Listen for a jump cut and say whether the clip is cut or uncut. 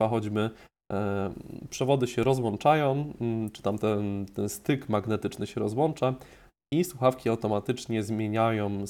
uncut